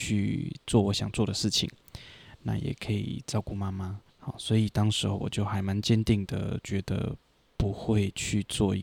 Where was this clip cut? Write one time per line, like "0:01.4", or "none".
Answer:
0:04.1